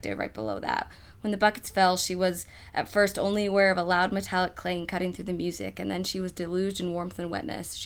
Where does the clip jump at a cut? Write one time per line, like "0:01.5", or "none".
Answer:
none